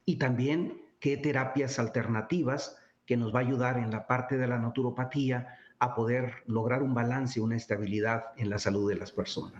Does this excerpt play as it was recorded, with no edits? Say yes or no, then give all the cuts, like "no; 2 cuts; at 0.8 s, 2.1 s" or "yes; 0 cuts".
yes; 0 cuts